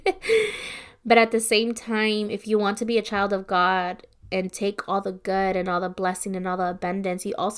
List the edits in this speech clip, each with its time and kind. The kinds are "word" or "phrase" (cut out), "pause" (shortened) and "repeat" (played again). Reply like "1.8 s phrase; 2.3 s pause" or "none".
none